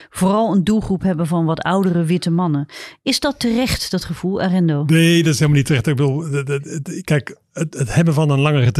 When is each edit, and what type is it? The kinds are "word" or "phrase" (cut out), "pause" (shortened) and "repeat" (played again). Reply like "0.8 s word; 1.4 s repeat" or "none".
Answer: none

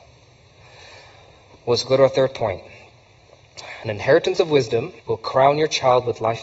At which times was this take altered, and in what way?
5.0 s pause

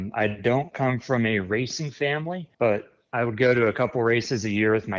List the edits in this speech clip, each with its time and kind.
2.5 s pause

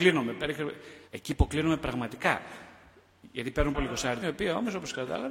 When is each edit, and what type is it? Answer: 1.1 s pause; 3.7 s word; 4.2 s word

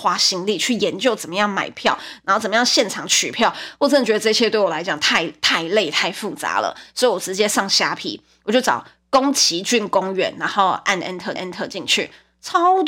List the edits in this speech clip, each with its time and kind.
11.4 s repeat

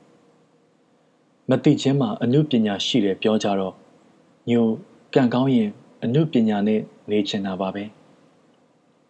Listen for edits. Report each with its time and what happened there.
none

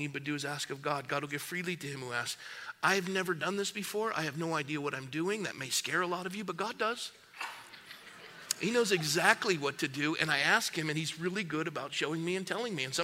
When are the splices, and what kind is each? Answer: none

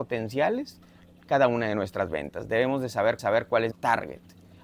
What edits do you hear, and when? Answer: 3.2 s repeat; 3.7 s word

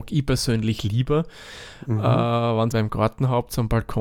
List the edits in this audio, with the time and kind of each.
2.7 s phrase

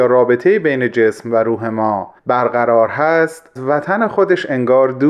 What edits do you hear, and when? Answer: 2.2 s pause; 3.6 s word

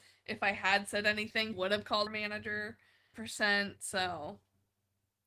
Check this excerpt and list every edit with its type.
1.5 s word; 2.1 s word; 3.1 s word

